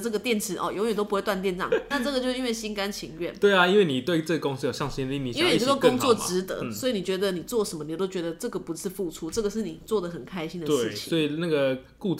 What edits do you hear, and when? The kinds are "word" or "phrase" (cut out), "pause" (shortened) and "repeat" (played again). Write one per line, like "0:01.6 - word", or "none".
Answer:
0:01.9 - word